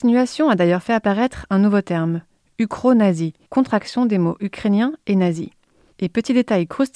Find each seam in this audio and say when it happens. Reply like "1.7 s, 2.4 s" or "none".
3.4 s